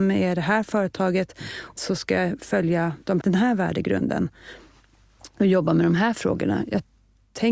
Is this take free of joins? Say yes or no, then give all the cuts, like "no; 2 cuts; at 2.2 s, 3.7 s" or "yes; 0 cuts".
no; 2 cuts; at 1.8 s, 3.2 s